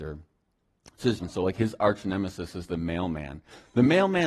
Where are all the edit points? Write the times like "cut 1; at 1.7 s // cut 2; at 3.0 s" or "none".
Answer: cut 1; at 1.2 s